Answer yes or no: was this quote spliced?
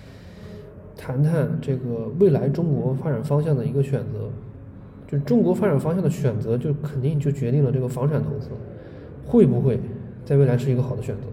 yes